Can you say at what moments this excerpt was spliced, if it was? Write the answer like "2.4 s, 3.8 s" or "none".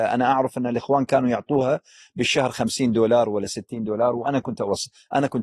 none